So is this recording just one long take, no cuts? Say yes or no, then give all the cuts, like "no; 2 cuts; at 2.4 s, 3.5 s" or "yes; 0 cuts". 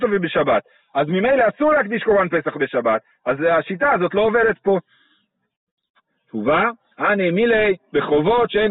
yes; 0 cuts